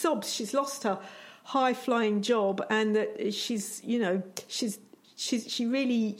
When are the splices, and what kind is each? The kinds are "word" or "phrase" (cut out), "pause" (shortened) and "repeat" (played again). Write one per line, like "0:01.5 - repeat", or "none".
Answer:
none